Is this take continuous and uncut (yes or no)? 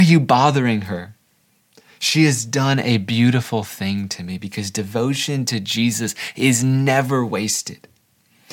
yes